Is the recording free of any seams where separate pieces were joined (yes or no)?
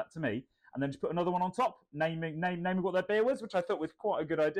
yes